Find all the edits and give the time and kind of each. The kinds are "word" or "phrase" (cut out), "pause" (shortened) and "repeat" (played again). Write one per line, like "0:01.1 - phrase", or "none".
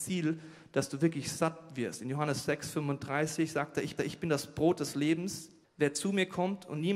0:04.0 - repeat
0:05.6 - pause